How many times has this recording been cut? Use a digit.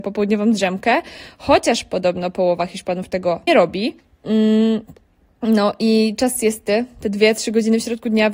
2